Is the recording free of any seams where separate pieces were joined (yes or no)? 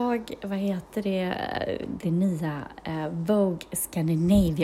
no